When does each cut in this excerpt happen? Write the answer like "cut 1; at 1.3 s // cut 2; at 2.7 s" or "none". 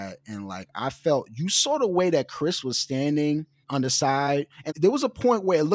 cut 1; at 3.6 s // cut 2; at 4.7 s